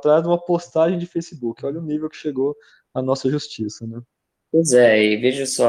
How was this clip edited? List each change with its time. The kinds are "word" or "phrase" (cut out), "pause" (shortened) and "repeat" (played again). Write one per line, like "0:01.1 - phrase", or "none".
none